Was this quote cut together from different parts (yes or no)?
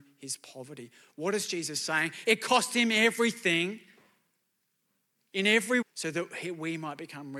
yes